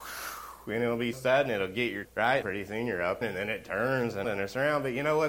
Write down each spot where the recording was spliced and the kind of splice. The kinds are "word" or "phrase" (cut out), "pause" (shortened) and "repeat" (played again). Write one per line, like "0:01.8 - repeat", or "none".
0:01.1 - word
0:02.0 - word
0:02.4 - word
0:03.2 - word
0:04.2 - phrase